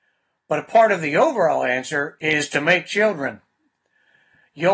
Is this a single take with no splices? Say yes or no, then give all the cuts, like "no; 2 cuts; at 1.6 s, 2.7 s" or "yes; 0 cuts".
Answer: yes; 0 cuts